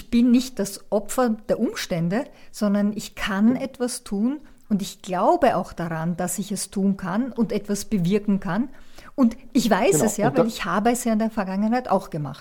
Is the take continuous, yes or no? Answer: yes